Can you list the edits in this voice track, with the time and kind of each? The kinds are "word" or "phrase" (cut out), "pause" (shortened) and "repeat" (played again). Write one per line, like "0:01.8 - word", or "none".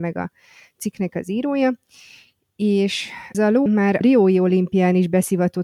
0:03.3 - word
0:03.7 - word
0:04.0 - word